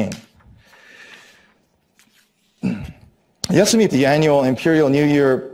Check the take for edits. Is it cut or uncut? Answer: cut